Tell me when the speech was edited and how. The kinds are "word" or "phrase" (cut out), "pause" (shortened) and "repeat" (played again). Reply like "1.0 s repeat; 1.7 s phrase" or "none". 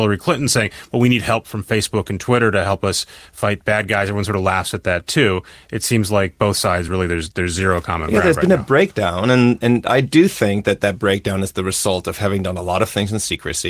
none